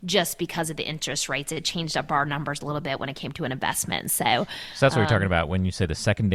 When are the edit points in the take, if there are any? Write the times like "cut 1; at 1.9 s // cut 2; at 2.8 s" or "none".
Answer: none